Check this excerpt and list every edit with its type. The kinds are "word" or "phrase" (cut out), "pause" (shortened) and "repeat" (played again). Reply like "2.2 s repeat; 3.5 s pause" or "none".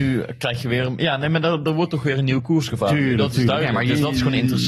none